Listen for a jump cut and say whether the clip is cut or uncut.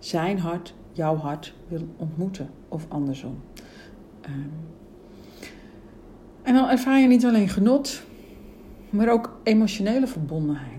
uncut